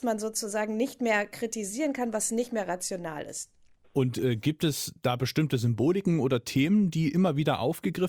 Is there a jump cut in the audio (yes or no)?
no